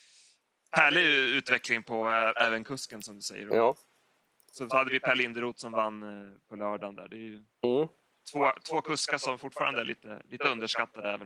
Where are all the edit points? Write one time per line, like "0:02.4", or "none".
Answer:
0:04.7